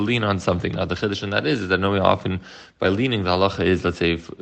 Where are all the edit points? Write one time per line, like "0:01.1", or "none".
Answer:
none